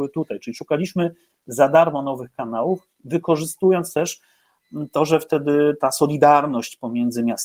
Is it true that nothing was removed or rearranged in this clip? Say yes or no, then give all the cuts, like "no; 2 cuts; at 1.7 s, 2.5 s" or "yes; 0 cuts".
yes; 0 cuts